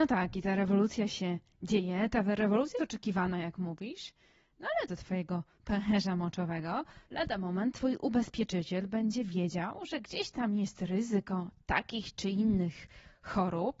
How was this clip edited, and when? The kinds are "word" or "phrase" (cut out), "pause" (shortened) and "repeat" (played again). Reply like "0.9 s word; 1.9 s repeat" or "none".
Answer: 2.8 s word; 4.9 s phrase; 7.0 s pause